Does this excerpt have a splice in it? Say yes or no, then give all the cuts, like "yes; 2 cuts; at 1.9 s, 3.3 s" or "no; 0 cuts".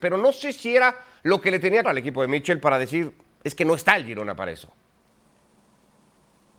yes; 1 cut; at 1.8 s